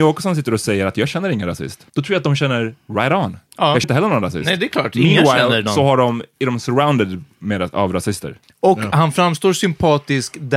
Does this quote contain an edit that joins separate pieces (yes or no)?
yes